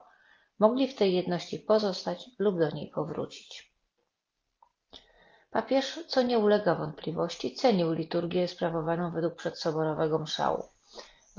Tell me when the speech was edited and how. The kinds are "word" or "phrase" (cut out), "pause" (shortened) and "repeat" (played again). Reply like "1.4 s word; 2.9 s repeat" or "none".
none